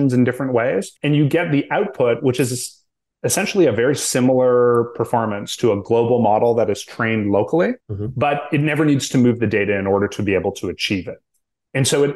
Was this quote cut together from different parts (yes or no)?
yes